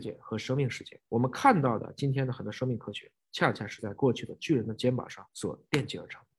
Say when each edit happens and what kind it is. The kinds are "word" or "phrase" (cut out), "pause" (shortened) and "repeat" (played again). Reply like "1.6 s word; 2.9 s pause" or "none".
1.1 s pause; 5.3 s pause